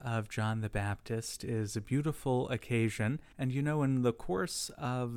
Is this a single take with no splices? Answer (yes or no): no